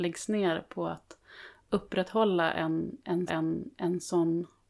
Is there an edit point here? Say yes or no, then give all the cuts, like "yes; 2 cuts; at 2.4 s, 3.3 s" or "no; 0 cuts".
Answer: yes; 1 cut; at 3.3 s